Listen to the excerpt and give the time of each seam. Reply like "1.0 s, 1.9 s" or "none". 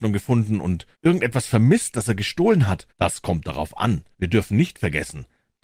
0.9 s, 2.9 s, 4.1 s

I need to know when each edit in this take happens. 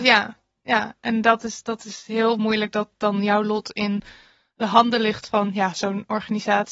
none

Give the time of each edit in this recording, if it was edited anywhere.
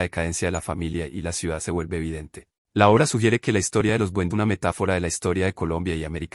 2.6 s, 4.3 s

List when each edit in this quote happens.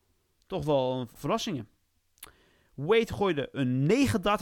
1.2 s

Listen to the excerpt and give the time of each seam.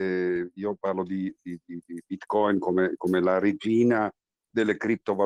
none

